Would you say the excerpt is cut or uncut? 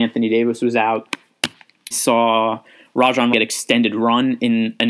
cut